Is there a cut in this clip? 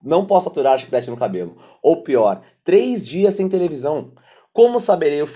no; 0 cuts

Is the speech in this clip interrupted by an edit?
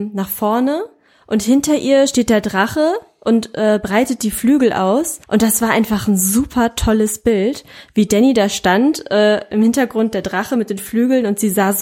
yes; 1 cut; at 5.2 s

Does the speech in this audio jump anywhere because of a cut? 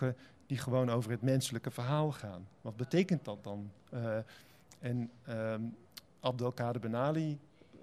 no; 0 cuts

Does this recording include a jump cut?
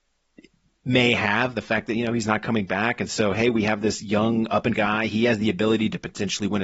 yes; 1 cut; at 4.7 s

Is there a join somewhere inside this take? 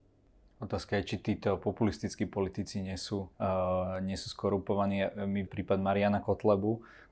yes; 2 cuts; at 3.3 s, 5.5 s

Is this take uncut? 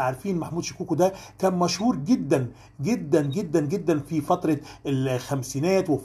yes; 0 cuts

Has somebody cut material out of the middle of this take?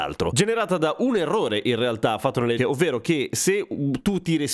yes; 1 cut; at 2.6 s

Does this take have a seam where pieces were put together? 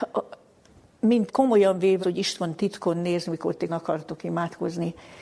yes; 3 cuts; at 1.3 s, 2.0 s, 3.7 s

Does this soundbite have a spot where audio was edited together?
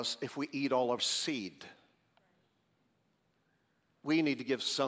yes; 1 cut; at 1.0 s

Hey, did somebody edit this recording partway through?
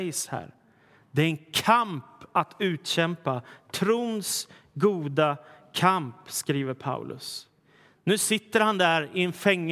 no; 0 cuts

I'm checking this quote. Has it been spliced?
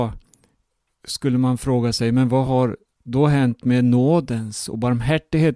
no; 0 cuts

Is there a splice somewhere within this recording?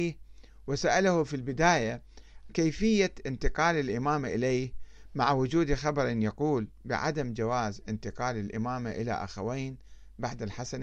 yes; 1 cut; at 2.5 s

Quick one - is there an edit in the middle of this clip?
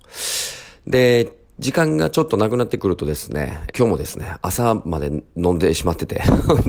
yes; 1 cut; at 3.7 s

